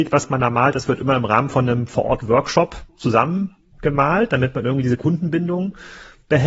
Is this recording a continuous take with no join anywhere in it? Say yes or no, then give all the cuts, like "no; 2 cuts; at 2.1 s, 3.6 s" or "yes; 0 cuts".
yes; 0 cuts